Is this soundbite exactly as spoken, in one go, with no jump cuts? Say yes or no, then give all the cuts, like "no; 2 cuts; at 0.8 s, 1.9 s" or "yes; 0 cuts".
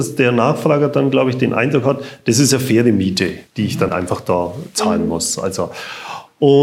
no; 2 cuts; at 3.5 s, 3.9 s